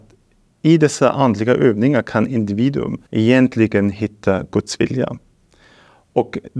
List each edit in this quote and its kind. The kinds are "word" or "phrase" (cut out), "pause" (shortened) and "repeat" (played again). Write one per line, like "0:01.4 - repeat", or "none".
0:03.1 - pause